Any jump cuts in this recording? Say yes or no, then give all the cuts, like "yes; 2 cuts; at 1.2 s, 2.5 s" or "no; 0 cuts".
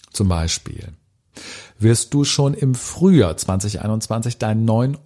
no; 0 cuts